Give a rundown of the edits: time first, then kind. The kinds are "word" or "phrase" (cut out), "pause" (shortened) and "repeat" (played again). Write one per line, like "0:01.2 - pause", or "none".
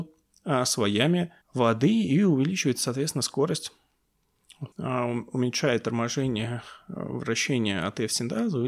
0:01.4 - pause
0:04.7 - pause